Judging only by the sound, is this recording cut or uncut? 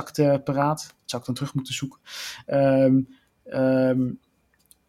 uncut